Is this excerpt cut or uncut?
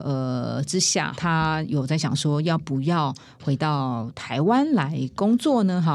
cut